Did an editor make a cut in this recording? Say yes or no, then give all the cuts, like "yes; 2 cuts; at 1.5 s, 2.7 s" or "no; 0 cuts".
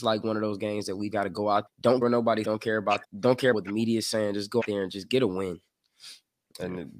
yes; 7 cuts; at 1.1 s, 1.7 s, 2.0 s, 2.4 s, 3.0 s, 3.5 s, 4.6 s